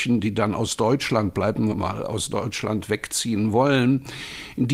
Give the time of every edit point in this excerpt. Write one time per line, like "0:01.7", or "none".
0:01.7